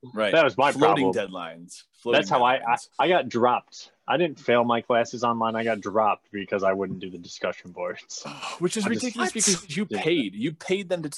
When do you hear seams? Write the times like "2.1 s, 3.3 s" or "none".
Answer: 2.9 s